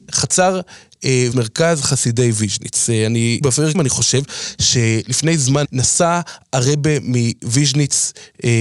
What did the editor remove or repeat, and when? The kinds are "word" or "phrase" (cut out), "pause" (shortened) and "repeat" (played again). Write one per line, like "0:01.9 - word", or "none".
0:01.3 - word
0:03.4 - word
0:03.7 - word
0:05.6 - word

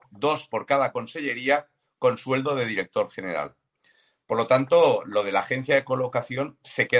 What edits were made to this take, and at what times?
none

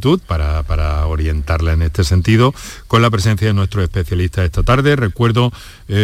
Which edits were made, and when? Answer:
none

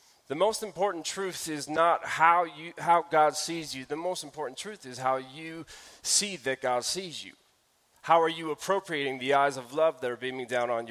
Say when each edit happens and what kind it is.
none

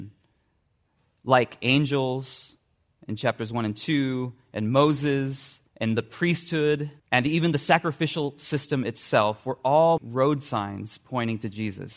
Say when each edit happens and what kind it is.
0:05.7 - pause
0:07.0 - pause
0:10.0 - word

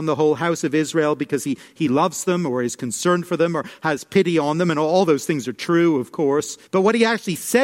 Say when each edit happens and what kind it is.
0:06.7 - pause

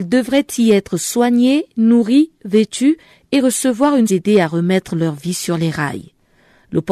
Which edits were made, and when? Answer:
0:04.1 - phrase

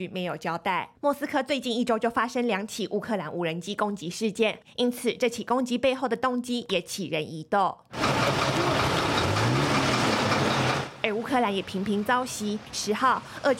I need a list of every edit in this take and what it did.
0:00.9 - pause

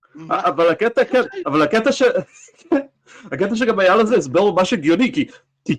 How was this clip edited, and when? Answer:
none

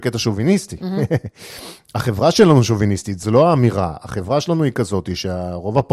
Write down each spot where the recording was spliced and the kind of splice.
0:03.2 - word

